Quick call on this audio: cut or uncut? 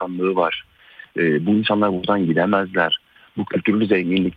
uncut